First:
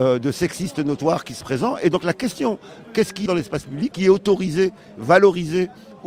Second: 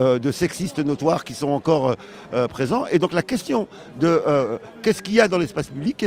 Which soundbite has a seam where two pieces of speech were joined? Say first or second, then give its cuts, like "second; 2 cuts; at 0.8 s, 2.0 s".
first; 4 cuts; at 1.4 s, 2.8 s, 3.3 s, 3.9 s